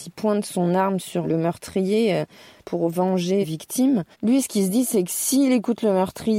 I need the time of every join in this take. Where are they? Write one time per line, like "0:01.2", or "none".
0:01.2
0:02.6
0:03.4
0:04.1